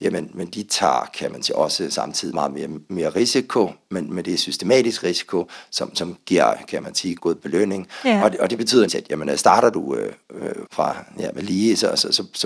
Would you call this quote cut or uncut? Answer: cut